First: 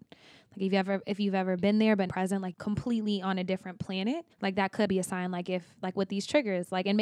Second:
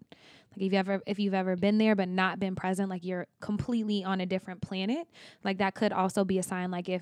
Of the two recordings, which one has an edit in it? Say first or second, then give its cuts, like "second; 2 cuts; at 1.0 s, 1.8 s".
first; 4 cuts; at 2.1 s, 2.5 s, 4.3 s, 4.9 s